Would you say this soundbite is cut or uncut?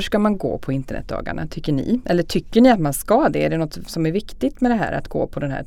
uncut